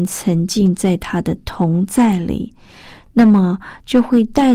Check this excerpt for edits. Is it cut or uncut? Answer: uncut